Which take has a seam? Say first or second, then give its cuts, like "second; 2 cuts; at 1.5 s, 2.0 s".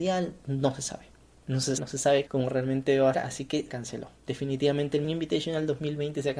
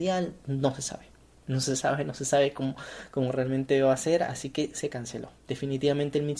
first; 5 cuts; at 1.8 s, 2.3 s, 3.1 s, 3.7 s, 5.0 s